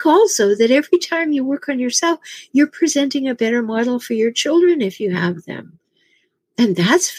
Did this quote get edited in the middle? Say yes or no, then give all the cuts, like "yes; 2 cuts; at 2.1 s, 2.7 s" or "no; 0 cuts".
no; 0 cuts